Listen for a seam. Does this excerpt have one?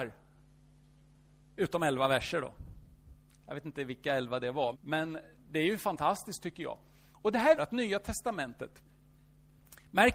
yes; 2 cuts; at 4.7 s, 7.6 s

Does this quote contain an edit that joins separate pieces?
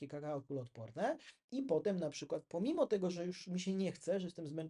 no; 0 cuts

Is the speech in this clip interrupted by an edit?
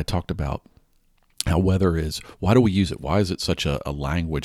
no; 0 cuts

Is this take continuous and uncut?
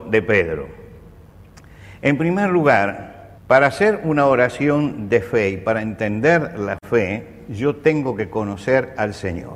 no; 1 cut; at 3.4 s

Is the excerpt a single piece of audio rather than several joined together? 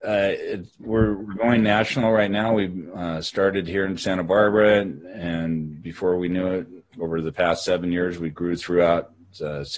no; 1 cut; at 6.9 s

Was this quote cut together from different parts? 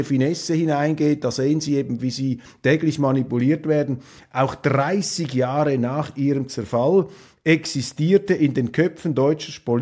no; 0 cuts

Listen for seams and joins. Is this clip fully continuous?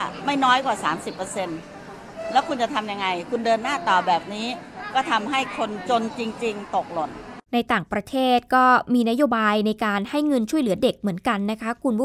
no; 1 cut; at 7.5 s

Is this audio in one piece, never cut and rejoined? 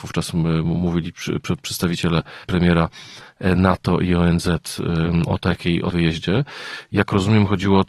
no; 3 cuts; at 2.4 s, 5.3 s, 5.9 s

